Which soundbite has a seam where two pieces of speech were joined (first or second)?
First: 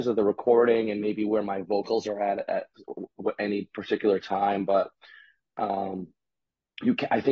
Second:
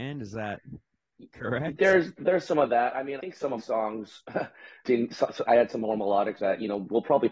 second